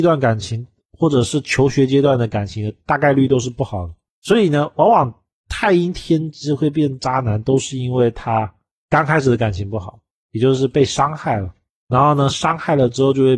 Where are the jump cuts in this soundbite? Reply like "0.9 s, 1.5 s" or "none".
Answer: none